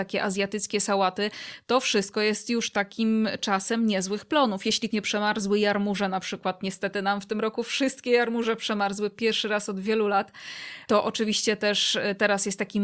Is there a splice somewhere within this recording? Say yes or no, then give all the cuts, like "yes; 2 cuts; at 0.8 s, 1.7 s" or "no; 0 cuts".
yes; 1 cut; at 4.9 s